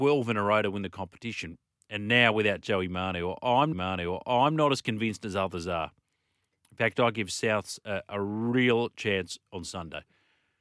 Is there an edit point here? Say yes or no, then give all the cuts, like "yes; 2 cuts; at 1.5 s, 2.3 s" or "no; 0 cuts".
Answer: yes; 1 cut; at 3.7 s